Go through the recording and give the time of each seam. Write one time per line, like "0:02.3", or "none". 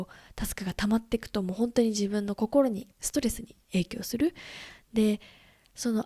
0:02.9